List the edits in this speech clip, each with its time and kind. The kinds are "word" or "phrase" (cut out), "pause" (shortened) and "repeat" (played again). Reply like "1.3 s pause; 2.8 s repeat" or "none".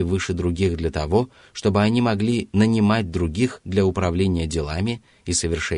none